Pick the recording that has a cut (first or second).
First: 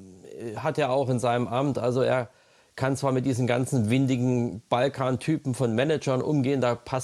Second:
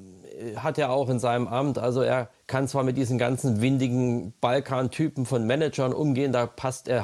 second